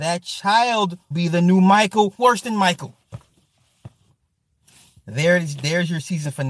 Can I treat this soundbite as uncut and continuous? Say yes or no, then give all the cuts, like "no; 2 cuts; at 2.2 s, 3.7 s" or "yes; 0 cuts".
no; 2 cuts; at 1.1 s, 2.2 s